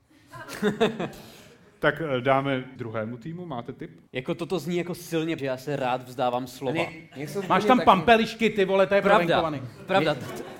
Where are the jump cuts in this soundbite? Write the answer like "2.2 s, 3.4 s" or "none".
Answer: 2.8 s, 4.1 s, 5.4 s